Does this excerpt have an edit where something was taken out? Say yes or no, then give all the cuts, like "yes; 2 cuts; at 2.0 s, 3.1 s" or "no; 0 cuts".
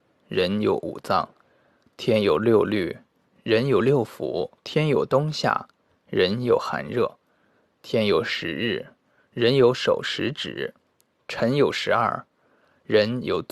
yes; 1 cut; at 4.6 s